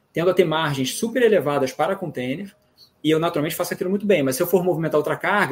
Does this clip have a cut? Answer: no; 0 cuts

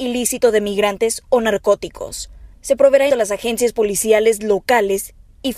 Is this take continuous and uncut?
no; 1 cut; at 3.1 s

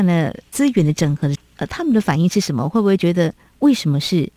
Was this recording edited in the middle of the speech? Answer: no; 0 cuts

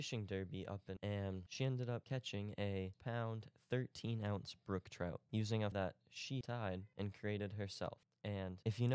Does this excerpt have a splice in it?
yes; 4 cuts; at 1.0 s, 2.9 s, 5.7 s, 6.4 s

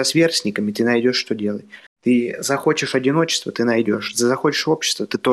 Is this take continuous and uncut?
yes; 0 cuts

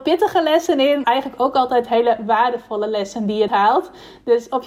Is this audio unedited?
no; 2 cuts; at 1.0 s, 3.5 s

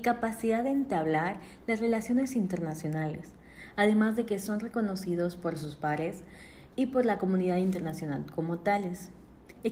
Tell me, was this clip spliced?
yes; 1 cut; at 6.7 s

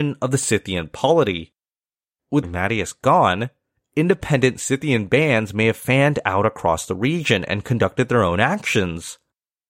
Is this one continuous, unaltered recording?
no; 1 cut; at 2.4 s

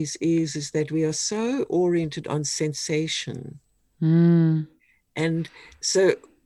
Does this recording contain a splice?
no; 0 cuts

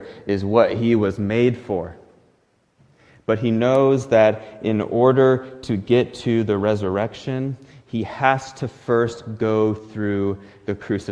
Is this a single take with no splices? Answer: yes; 0 cuts

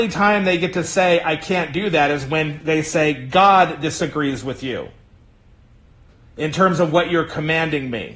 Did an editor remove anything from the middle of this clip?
no; 0 cuts

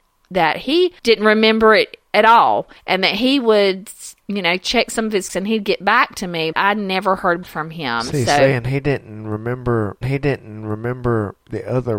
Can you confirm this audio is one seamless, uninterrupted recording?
no; 7 cuts; at 1.0 s, 2.1 s, 2.8 s, 5.3 s, 6.5 s, 7.4 s, 10.0 s

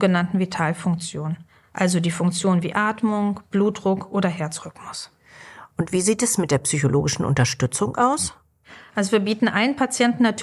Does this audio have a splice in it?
no; 0 cuts

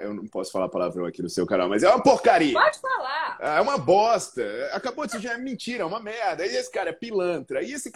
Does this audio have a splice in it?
no; 0 cuts

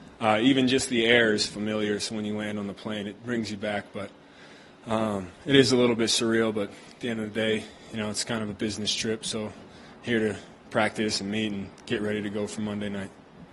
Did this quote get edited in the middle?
no; 0 cuts

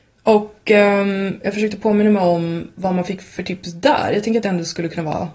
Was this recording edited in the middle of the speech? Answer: no; 0 cuts

